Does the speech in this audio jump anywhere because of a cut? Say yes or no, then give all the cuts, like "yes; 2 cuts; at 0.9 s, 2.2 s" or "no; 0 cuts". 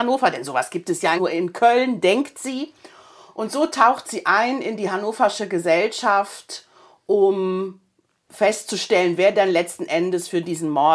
no; 0 cuts